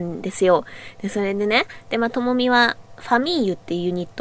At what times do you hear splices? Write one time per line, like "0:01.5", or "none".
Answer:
none